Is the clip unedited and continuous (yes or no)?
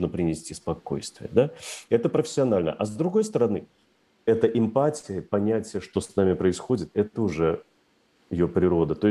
yes